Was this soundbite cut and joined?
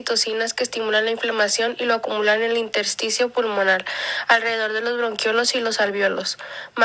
no; 0 cuts

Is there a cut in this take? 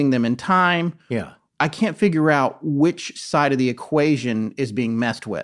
no; 0 cuts

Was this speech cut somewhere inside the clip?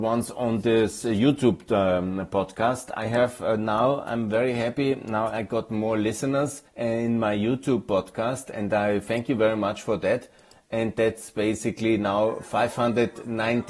yes; 1 cut; at 6.7 s

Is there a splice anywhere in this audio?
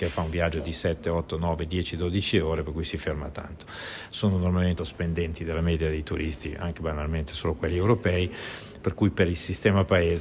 yes; 1 cut; at 4.8 s

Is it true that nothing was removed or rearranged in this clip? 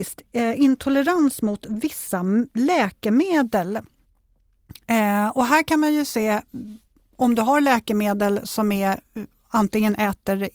yes; 0 cuts

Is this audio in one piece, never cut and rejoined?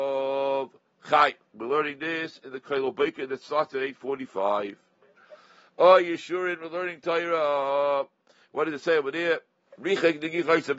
yes; 0 cuts

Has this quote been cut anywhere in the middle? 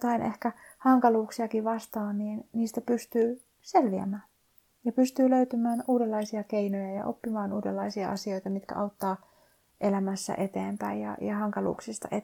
no; 0 cuts

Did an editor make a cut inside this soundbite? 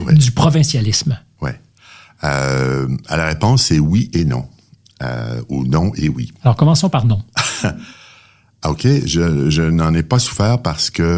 no; 0 cuts

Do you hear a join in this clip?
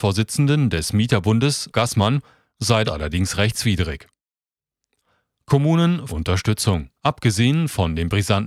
yes; 4 cuts; at 1.7 s, 2.8 s, 6.1 s, 7.0 s

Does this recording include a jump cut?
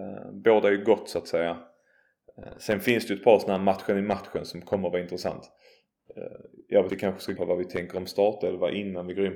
yes; 2 cuts; at 6.9 s, 7.4 s

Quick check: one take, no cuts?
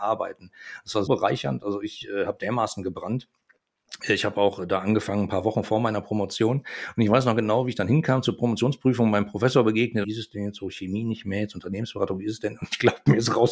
no; 2 cuts; at 1.1 s, 10.0 s

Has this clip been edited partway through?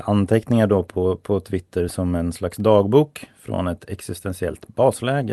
no; 0 cuts

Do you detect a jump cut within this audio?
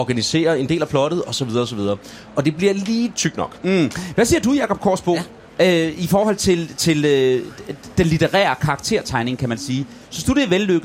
no; 0 cuts

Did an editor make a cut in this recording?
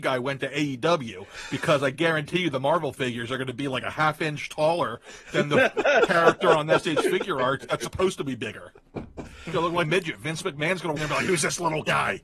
yes; 2 cuts; at 9.8 s, 11.0 s

